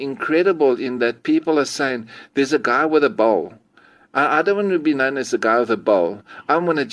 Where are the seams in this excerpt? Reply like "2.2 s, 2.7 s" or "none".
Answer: none